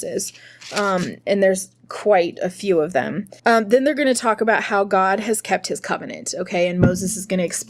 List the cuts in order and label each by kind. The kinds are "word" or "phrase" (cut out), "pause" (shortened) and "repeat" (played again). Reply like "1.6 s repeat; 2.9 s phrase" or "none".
3.4 s pause